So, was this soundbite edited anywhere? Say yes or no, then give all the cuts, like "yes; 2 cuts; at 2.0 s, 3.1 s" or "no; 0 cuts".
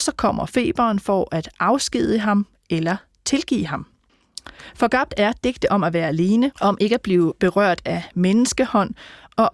no; 0 cuts